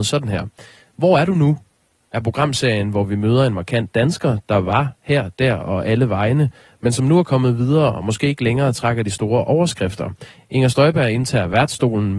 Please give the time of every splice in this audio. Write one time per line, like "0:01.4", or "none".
none